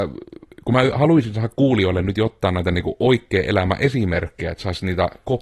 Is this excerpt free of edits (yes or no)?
yes